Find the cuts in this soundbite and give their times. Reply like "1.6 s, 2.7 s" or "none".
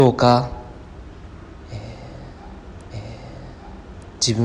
2.9 s